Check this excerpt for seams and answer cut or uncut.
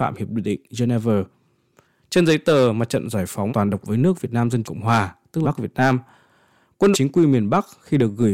cut